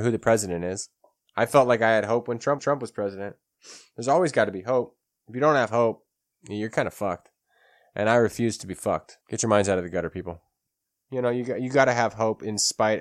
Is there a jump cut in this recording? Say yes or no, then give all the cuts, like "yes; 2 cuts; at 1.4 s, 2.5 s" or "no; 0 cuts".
yes; 2 cuts; at 2.6 s, 9.2 s